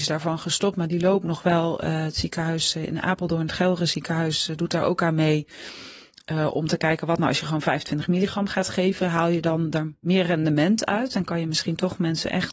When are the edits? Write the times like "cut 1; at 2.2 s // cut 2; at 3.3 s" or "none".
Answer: none

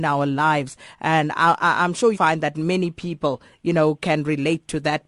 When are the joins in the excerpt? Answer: cut 1; at 2.1 s

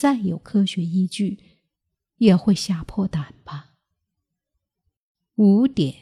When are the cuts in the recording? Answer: none

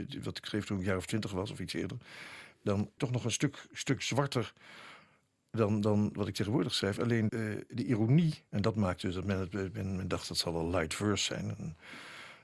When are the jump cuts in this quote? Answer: cut 1; at 3.0 s // cut 2; at 7.3 s // cut 3; at 8.5 s

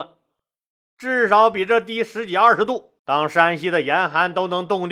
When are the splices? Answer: cut 1; at 3.0 s

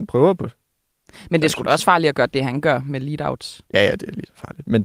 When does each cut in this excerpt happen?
cut 1; at 3.7 s

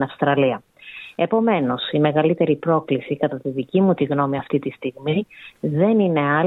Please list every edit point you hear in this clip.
none

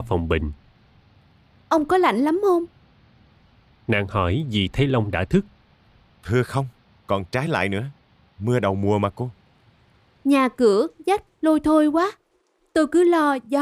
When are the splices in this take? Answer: none

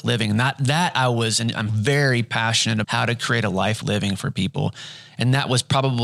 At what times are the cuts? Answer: cut 1; at 1.7 s // cut 2; at 2.8 s // cut 3; at 3.8 s

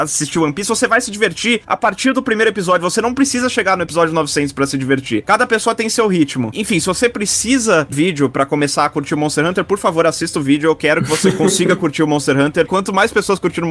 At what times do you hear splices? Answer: cut 1; at 7.9 s // cut 2; at 12.7 s

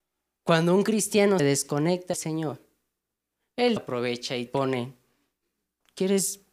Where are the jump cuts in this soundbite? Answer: cut 1; at 1.4 s // cut 2; at 2.1 s // cut 3; at 3.8 s // cut 4; at 4.5 s

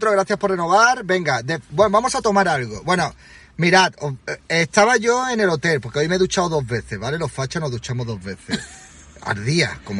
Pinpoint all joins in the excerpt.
none

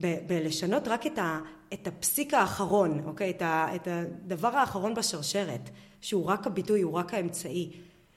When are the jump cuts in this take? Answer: none

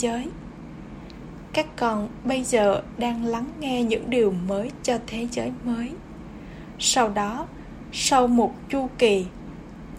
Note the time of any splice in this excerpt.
none

